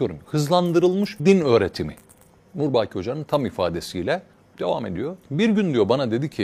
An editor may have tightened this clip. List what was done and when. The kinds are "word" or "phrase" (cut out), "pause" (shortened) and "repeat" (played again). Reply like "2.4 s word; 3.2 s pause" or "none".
1.2 s word; 2.3 s pause; 4.3 s pause